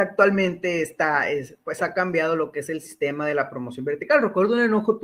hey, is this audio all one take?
yes; 0 cuts

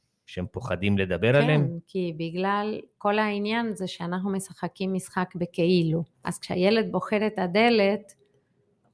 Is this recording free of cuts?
no; 1 cut; at 6.1 s

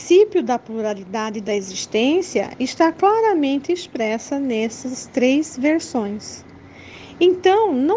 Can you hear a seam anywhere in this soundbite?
no; 0 cuts

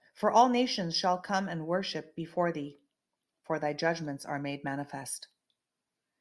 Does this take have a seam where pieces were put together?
no; 0 cuts

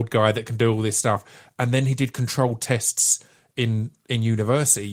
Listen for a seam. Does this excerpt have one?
no; 0 cuts

